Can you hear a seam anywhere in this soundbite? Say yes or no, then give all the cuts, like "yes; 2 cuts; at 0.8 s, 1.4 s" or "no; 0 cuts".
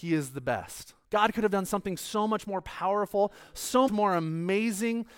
yes; 2 cuts; at 1.0 s, 3.9 s